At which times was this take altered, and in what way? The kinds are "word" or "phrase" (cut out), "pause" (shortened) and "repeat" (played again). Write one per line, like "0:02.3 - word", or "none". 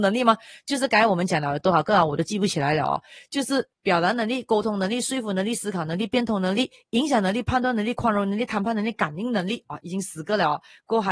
0:03.7 - pause